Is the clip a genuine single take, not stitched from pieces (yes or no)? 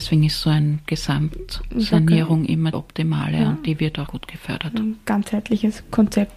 no